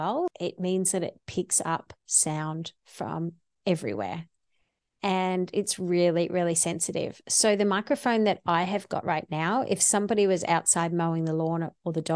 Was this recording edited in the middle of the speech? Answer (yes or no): no